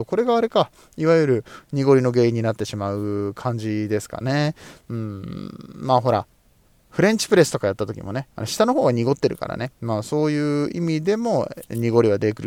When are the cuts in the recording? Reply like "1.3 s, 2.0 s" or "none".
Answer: 6.7 s

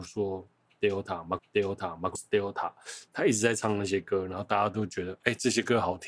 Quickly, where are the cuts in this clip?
1.4 s, 2.1 s

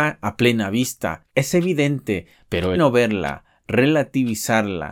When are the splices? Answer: 1.3 s, 2.7 s

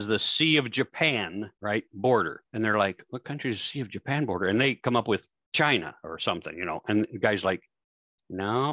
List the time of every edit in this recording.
1.6 s, 2.5 s

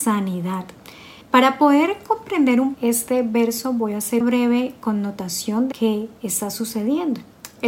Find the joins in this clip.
1.2 s, 2.7 s, 4.2 s, 5.7 s

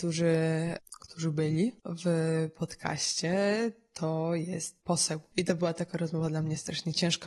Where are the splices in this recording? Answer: none

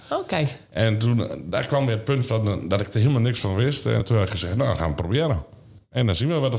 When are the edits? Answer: 4.0 s

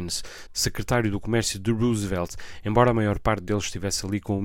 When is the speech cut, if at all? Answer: none

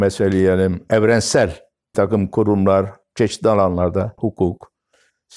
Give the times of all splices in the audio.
1.9 s, 4.2 s

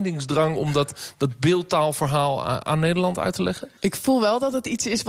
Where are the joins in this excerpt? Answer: 3.8 s

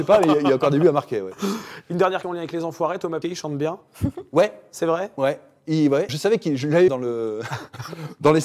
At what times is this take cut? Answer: 2.2 s, 3.2 s, 6.1 s, 6.9 s

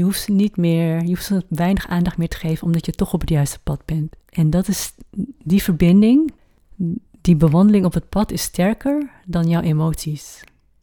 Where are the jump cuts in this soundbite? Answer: 4.2 s

